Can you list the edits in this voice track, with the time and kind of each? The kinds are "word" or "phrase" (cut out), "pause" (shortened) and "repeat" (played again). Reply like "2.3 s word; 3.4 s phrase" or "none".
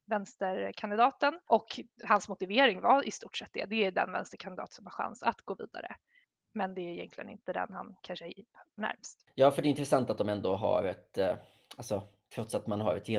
8.8 s word

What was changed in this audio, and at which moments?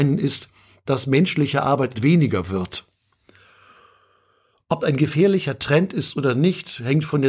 1.9 s word; 4.8 s word

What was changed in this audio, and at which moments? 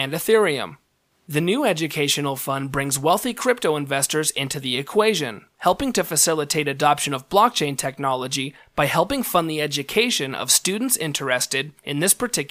none

